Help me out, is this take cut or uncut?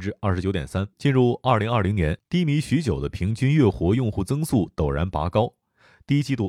cut